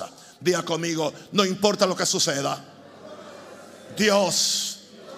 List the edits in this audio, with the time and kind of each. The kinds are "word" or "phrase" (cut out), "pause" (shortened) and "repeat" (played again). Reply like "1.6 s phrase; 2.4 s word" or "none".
none